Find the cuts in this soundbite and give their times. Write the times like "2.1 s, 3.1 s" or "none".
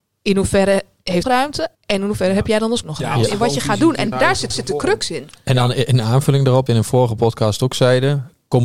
1.2 s, 1.7 s, 2.8 s, 4.1 s, 4.5 s, 6.7 s